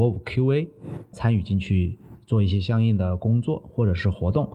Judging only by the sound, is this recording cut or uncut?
cut